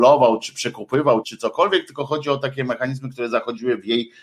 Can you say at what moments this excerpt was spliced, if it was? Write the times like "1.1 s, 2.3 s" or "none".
1.2 s